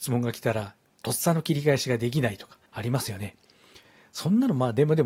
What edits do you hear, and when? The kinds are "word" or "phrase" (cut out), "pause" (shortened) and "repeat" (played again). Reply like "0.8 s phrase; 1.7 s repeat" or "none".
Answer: 2.7 s pause

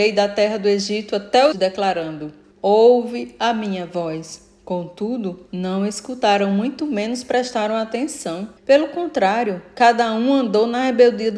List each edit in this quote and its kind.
1.5 s phrase; 2.5 s pause; 5.5 s pause; 8.6 s pause

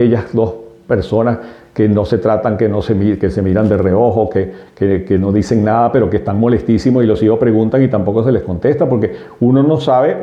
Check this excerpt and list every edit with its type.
none

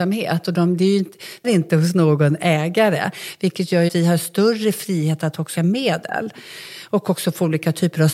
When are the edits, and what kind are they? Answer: 1.4 s word; 3.9 s word; 5.6 s word

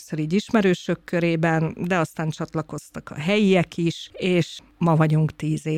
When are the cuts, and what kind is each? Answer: none

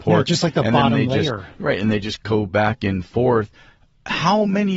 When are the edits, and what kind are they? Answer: none

